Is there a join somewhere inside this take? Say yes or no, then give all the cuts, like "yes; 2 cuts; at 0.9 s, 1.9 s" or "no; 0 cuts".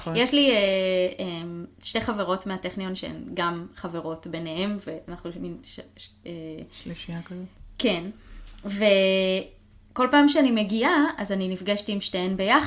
no; 0 cuts